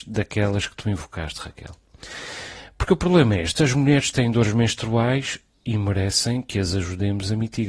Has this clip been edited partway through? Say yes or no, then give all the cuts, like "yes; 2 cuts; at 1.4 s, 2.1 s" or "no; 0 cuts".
no; 0 cuts